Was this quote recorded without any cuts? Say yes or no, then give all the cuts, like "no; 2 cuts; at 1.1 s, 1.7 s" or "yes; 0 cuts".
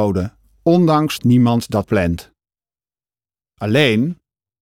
no; 2 cuts; at 1.2 s, 1.8 s